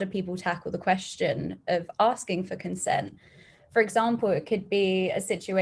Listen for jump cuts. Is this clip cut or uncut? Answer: uncut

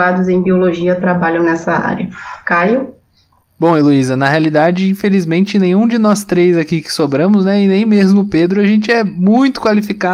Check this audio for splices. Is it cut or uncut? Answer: uncut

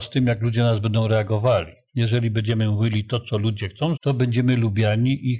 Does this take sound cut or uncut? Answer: cut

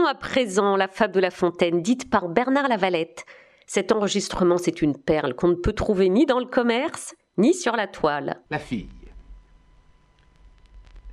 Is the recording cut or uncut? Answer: cut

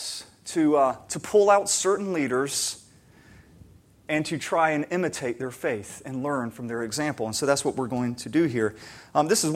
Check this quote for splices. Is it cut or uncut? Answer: uncut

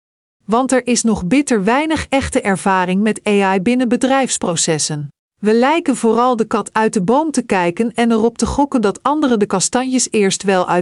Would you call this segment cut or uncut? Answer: cut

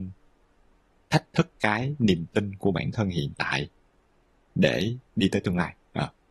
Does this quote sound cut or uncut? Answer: cut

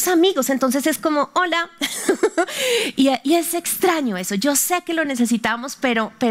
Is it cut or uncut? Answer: uncut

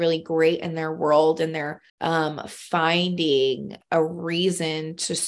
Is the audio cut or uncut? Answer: cut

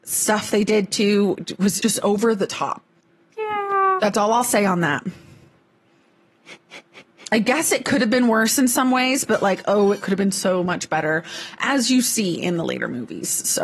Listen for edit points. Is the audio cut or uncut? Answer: cut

